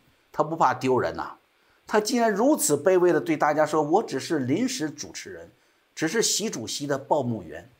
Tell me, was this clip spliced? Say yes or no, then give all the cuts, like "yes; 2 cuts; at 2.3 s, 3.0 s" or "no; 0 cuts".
no; 0 cuts